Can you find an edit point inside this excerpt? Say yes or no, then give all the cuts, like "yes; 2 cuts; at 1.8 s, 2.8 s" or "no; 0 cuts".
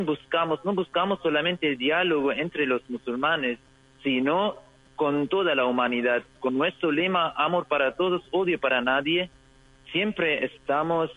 no; 0 cuts